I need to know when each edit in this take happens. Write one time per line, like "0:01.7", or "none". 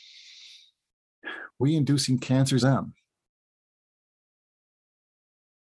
0:01.6
0:02.6

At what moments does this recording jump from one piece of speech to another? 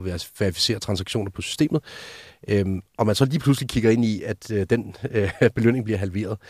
none

